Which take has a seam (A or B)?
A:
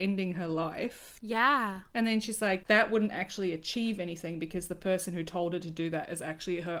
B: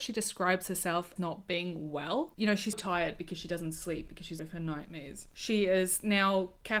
B